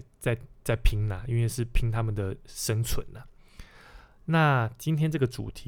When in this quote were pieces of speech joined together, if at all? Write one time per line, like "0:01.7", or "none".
none

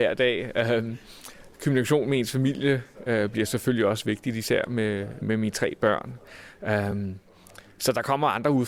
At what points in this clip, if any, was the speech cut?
none

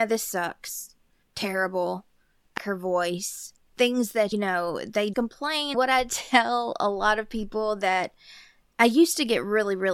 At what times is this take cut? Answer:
0:01.2
0:02.6
0:04.3
0:05.1
0:05.7

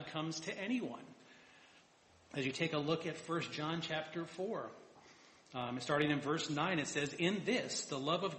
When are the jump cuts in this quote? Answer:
none

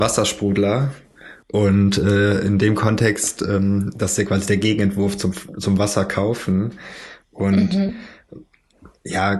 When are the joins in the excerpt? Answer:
none

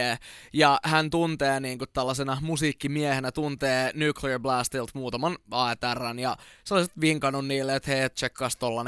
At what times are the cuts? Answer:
none

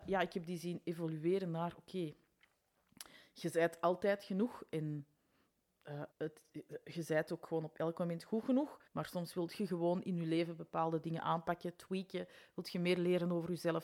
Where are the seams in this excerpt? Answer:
0:06.1
0:08.9

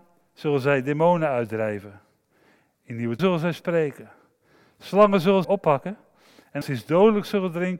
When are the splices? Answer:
0:03.2
0:05.4
0:06.6

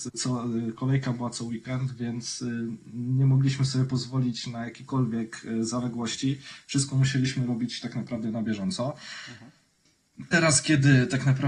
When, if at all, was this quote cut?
none

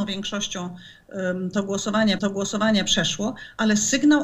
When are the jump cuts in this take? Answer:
0:02.2

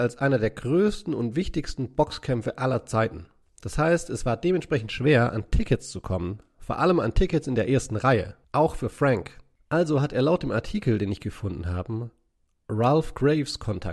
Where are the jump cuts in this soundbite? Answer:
0:08.4

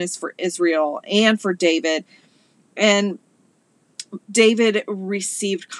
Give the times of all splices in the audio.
0:04.2

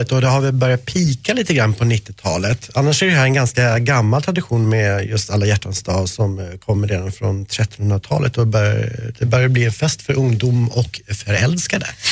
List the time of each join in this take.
none

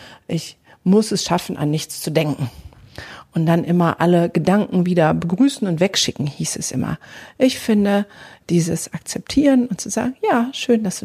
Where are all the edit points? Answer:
none

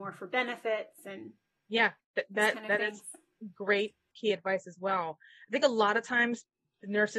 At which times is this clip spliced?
none

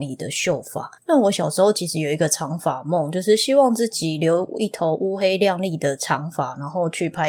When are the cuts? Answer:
0:01.0

